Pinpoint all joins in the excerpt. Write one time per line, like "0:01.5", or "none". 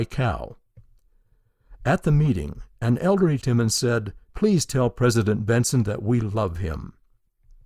0:03.4
0:04.2